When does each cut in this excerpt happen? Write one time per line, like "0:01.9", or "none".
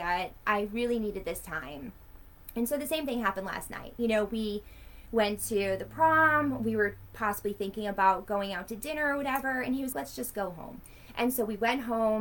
0:09.9